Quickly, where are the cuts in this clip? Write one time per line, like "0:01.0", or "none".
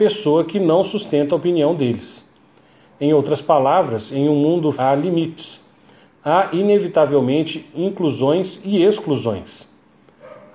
0:04.7